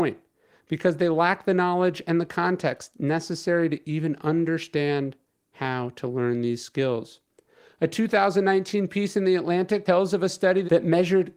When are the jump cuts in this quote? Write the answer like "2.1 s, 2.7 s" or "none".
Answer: none